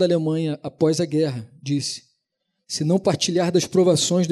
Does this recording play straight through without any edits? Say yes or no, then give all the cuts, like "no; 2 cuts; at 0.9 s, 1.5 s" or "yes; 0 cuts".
yes; 0 cuts